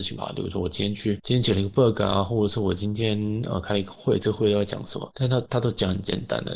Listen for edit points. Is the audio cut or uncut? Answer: uncut